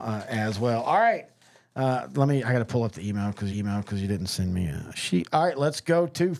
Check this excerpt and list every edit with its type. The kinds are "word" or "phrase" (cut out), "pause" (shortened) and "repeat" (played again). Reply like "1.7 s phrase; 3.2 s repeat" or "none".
3.5 s repeat